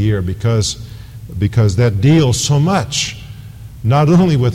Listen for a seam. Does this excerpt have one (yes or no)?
no